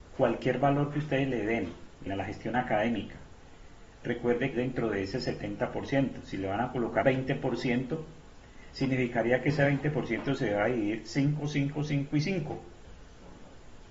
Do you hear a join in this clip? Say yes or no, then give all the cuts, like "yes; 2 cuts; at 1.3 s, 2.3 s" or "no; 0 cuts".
yes; 3 cuts; at 2.1 s, 4.5 s, 7.0 s